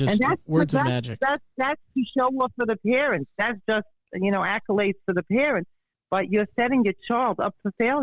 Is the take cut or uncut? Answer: uncut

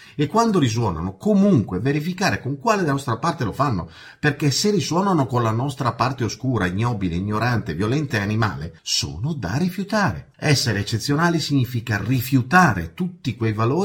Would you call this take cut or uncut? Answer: cut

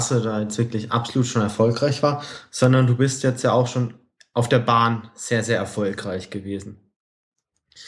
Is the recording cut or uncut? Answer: uncut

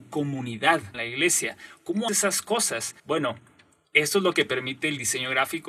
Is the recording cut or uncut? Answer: cut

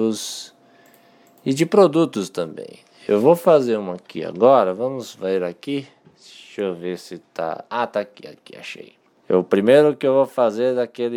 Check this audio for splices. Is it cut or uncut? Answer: uncut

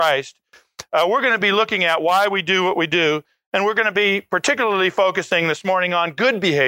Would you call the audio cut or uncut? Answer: uncut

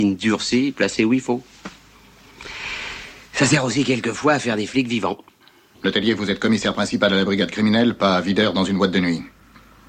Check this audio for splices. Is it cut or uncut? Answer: uncut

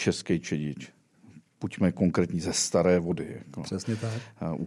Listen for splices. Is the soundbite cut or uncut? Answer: uncut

